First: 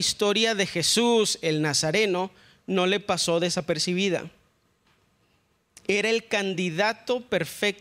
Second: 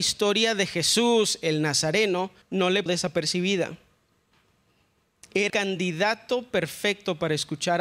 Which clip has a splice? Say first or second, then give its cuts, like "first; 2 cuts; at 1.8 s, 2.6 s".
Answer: second; 3 cuts; at 2.4 s, 2.9 s, 5.5 s